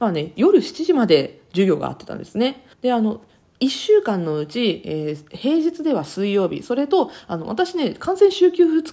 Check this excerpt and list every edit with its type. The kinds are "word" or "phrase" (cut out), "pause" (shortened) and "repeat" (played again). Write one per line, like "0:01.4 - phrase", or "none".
0:02.7 - pause
0:03.4 - pause